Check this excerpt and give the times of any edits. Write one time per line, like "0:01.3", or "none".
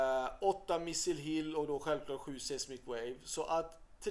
none